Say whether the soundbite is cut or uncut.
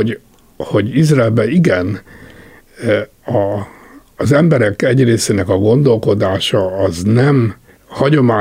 uncut